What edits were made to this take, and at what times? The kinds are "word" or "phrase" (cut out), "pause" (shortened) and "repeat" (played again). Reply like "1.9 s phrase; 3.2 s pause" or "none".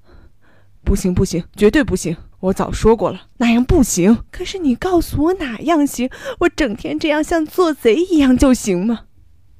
1.5 s pause; 2.3 s pause; 3.3 s pause; 4.3 s pause